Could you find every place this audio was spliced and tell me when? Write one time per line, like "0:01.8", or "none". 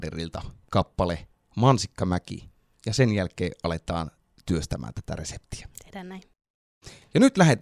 none